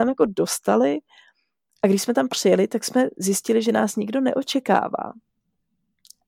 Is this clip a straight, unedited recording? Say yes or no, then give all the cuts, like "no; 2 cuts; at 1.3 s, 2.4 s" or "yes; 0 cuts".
yes; 0 cuts